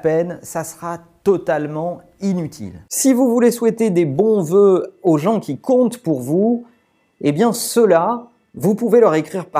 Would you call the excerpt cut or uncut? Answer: uncut